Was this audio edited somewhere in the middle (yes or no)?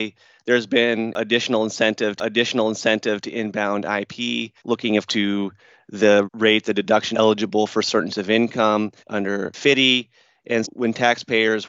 yes